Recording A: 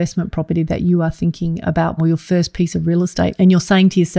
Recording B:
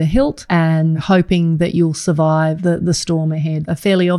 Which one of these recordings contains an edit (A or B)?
A